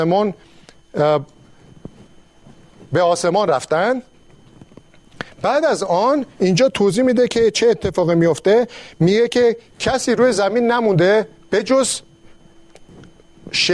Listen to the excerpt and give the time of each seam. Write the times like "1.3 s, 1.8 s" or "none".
none